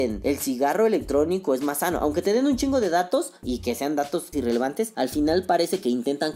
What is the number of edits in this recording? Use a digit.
1